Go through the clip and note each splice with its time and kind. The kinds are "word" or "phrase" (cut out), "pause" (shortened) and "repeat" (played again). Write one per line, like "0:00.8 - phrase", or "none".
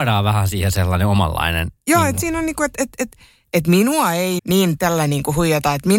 0:04.4 - word
0:04.8 - word

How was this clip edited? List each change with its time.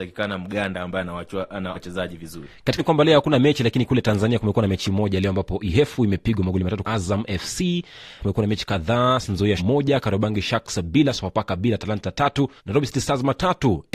0:01.7 - phrase
0:02.8 - word
0:06.8 - phrase
0:08.2 - phrase
0:09.6 - word
0:12.6 - pause

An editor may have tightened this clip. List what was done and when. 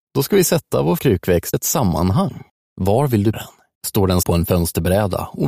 0:01.0 - word
0:01.5 - word
0:02.5 - pause
0:03.3 - word
0:03.8 - pause
0:04.2 - word

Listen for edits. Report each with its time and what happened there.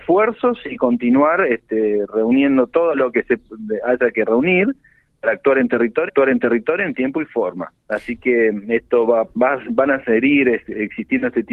0:06.1 - repeat
0:07.8 - pause
0:09.3 - word

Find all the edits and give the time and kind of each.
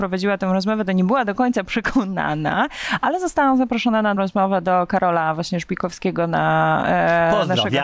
0:04.2 - word

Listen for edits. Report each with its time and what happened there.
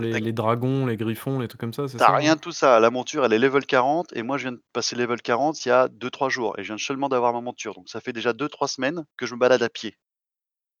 0:09.1 - pause

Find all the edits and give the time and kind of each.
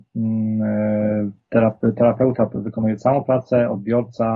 none

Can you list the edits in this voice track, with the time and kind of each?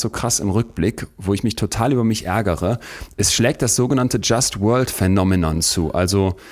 none

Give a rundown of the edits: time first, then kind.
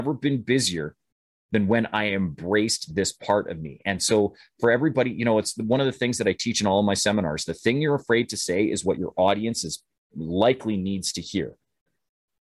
none

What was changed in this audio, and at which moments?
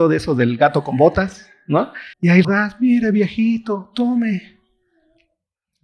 0:02.1 - pause
0:02.4 - phrase

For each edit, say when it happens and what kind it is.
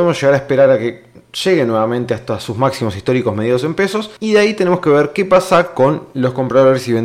0:04.2 - pause

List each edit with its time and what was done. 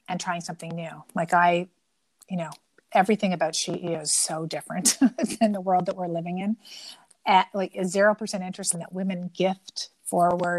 0:08.7 - word

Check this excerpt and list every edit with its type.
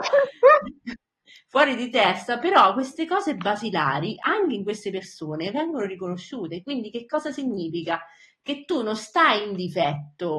none

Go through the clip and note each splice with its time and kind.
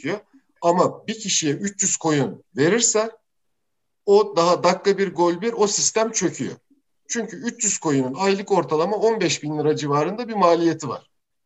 none

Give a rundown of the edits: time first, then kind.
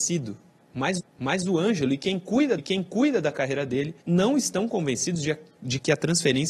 0:01.0 - repeat
0:02.6 - repeat
0:04.0 - pause

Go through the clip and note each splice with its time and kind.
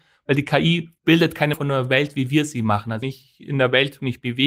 0:01.0 - pause
0:01.5 - word
0:03.0 - word

